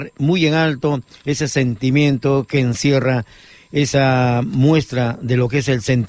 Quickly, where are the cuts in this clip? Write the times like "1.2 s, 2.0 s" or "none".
none